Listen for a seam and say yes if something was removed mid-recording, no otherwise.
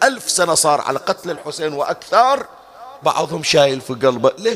yes